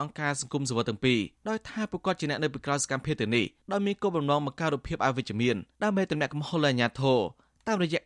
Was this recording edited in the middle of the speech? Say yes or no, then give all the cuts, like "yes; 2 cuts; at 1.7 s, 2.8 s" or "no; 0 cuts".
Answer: yes; 3 cuts; at 1.3 s, 3.6 s, 5.7 s